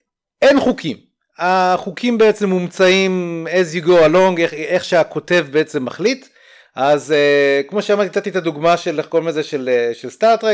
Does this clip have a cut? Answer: no; 0 cuts

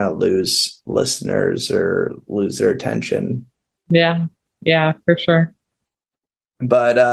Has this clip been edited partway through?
no; 0 cuts

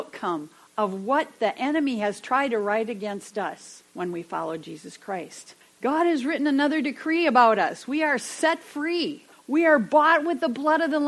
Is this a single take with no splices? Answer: no; 3 cuts; at 3.9 s, 5.6 s, 9.3 s

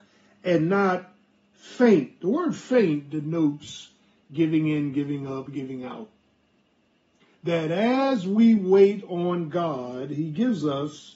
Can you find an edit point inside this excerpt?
no; 0 cuts

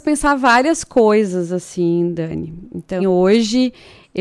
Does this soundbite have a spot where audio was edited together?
yes; 1 cut; at 3.0 s

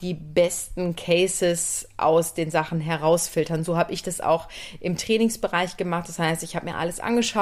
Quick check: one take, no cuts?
yes; 0 cuts

